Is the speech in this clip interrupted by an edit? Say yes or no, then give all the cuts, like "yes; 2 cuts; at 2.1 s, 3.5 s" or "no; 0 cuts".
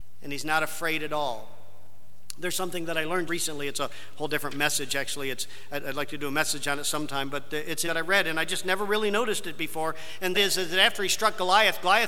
yes; 3 cuts; at 3.3 s, 7.8 s, 10.3 s